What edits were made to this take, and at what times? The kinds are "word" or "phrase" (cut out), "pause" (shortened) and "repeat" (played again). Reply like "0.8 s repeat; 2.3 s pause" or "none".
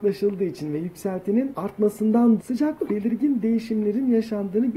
2.4 s word; 2.9 s word